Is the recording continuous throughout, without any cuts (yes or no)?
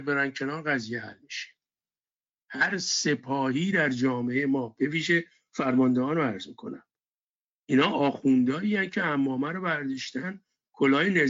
yes